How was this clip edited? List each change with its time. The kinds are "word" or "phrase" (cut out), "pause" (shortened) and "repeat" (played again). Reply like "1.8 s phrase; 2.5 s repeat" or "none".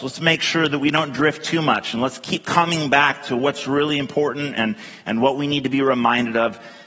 none